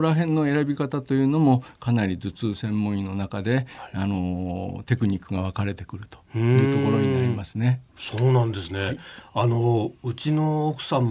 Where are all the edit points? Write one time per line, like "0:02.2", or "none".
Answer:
0:07.9